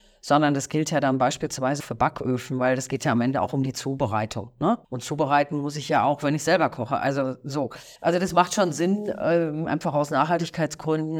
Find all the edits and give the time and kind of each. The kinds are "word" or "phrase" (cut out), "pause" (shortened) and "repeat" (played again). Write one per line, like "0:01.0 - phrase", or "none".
0:01.8 - word
0:04.8 - pause
0:08.0 - pause